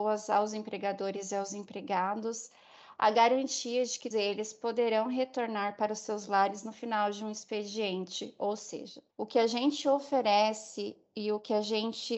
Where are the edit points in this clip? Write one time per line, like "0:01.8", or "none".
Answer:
0:04.1
0:09.1